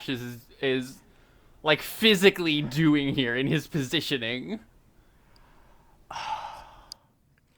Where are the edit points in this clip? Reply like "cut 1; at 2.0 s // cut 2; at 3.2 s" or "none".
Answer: none